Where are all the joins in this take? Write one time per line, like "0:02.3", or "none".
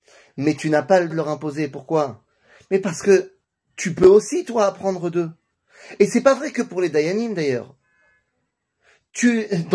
0:01.1